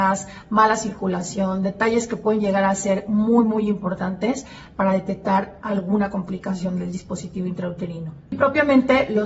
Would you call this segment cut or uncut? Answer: uncut